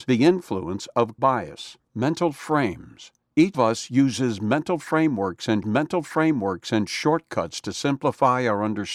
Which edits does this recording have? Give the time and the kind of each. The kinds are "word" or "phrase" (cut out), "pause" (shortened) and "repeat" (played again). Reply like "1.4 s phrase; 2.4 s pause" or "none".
1.2 s word; 1.8 s pause; 3.5 s word; 5.6 s repeat